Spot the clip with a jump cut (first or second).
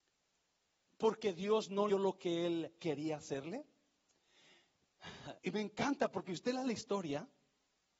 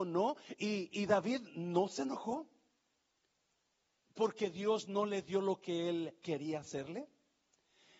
first